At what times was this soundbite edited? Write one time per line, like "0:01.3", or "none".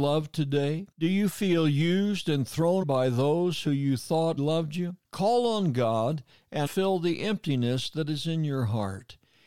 0:00.9
0:02.8
0:04.4
0:05.0
0:06.7